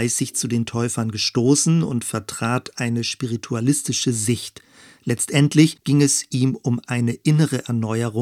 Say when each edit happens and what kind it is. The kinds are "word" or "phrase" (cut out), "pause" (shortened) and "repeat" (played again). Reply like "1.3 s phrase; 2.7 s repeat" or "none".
none